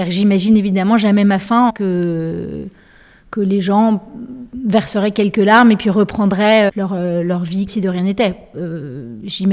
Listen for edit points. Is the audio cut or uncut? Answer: cut